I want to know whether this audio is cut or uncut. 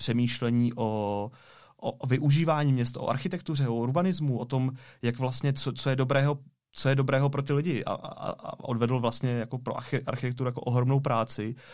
uncut